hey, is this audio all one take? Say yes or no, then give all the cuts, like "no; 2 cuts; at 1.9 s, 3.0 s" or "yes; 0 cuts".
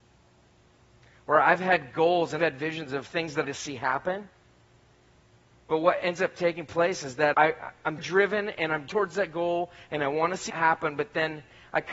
no; 6 cuts; at 2.4 s, 3.4 s, 7.3 s, 8.0 s, 8.9 s, 10.5 s